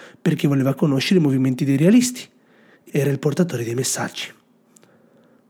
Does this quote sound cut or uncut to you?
cut